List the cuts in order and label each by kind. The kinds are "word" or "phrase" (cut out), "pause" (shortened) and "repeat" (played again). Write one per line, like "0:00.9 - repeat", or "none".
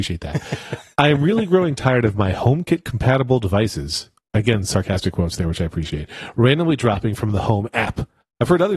none